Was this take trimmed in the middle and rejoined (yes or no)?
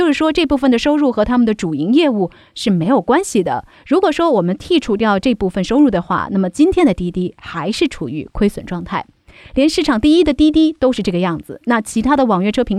no